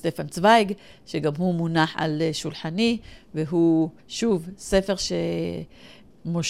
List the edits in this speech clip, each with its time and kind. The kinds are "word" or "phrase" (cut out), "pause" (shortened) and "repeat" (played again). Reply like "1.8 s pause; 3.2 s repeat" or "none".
4.0 s pause